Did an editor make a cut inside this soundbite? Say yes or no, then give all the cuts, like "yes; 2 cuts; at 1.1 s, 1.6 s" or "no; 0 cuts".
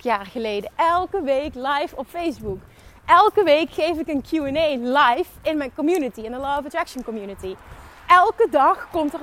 no; 0 cuts